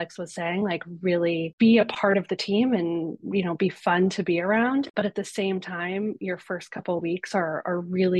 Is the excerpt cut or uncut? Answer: uncut